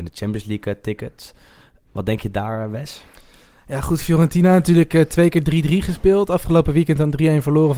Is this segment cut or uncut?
uncut